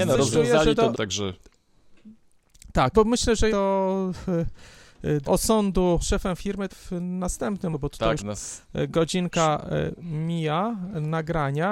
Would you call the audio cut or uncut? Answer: cut